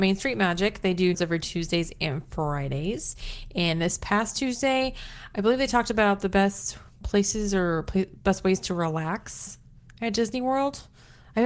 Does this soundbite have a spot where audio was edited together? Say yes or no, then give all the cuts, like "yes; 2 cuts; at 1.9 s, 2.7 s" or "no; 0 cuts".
yes; 1 cut; at 1.1 s